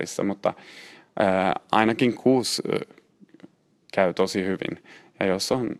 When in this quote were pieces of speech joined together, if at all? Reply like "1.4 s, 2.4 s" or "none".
none